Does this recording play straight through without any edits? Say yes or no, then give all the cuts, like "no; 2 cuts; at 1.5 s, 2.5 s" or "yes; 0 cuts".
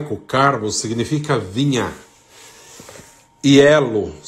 yes; 0 cuts